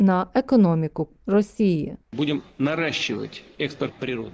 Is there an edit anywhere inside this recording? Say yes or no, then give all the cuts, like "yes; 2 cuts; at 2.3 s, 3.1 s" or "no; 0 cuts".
yes; 1 cut; at 2.0 s